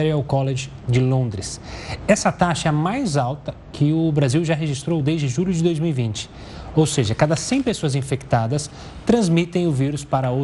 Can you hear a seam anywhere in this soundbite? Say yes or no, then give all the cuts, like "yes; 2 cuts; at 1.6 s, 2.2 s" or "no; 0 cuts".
no; 0 cuts